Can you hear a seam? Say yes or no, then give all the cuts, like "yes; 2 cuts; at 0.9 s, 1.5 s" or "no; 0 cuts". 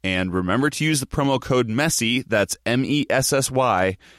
no; 0 cuts